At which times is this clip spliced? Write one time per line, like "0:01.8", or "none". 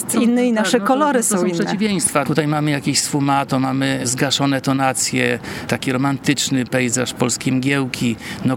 none